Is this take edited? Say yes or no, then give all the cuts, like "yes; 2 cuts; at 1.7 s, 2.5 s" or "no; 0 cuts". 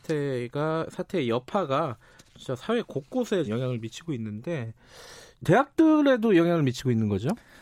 yes; 2 cuts; at 3.4 s, 5.4 s